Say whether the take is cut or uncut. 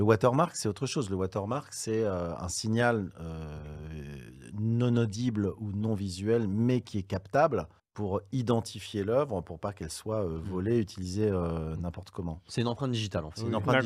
cut